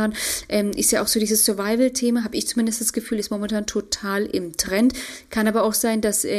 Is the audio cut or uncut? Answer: uncut